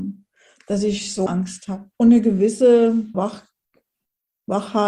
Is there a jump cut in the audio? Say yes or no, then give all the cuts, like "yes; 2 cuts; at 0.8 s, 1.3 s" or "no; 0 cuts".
yes; 3 cuts; at 1.3 s, 1.9 s, 3.1 s